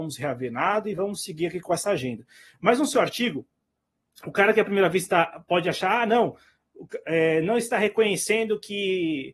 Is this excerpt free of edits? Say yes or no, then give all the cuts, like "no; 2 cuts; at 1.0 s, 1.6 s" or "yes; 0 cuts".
yes; 0 cuts